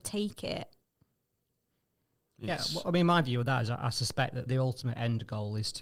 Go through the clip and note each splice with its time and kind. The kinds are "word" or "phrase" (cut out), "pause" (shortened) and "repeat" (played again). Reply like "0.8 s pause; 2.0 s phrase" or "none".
4.5 s word